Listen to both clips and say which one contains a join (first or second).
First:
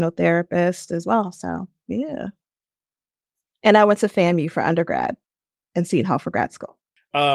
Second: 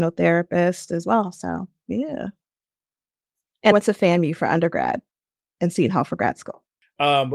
second